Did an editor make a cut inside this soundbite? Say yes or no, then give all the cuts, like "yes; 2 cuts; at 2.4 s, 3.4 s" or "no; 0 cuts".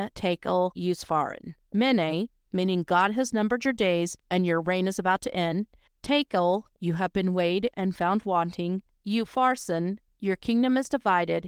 no; 0 cuts